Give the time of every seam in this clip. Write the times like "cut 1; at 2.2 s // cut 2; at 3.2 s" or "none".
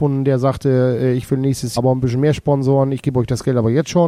cut 1; at 1.8 s